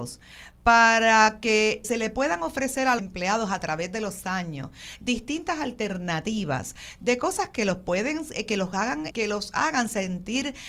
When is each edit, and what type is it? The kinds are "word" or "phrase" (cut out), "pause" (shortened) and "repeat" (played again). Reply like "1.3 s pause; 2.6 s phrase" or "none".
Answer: 1.8 s word; 3.0 s word; 9.1 s word